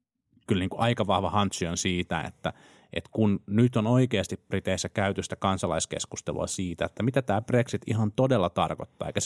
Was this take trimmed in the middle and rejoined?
no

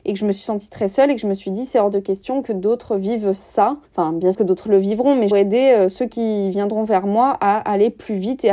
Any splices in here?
yes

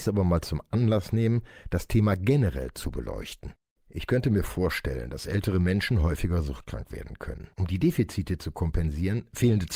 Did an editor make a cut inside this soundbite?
yes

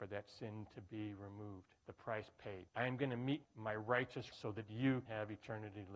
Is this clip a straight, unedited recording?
no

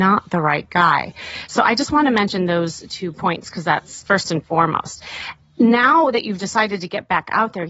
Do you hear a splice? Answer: yes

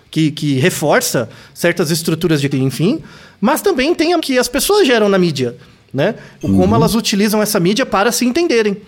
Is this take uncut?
no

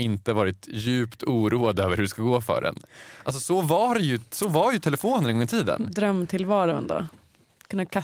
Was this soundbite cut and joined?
no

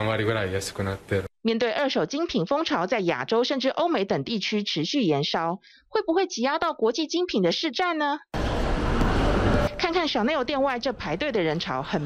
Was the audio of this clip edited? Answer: no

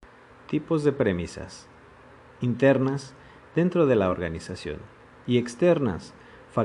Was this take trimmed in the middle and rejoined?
no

